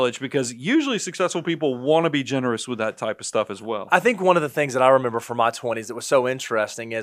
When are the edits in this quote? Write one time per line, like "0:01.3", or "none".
none